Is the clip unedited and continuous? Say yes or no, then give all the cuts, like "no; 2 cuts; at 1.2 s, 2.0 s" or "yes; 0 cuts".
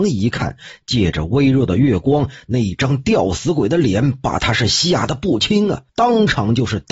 no; 1 cut; at 5.9 s